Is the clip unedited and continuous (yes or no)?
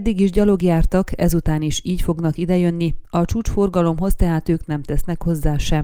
yes